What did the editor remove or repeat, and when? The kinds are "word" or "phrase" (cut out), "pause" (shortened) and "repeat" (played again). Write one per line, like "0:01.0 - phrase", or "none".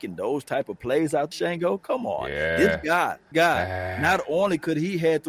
0:01.3 - word
0:03.3 - word